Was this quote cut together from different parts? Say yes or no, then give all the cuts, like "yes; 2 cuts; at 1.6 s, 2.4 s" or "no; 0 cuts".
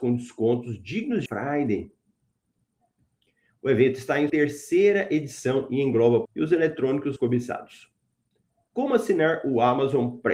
yes; 4 cuts; at 1.3 s, 4.3 s, 6.2 s, 7.2 s